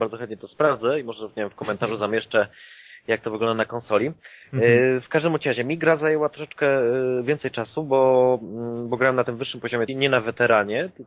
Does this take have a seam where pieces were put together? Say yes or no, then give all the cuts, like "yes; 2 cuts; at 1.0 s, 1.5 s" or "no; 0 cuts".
yes; 1 cut; at 9.9 s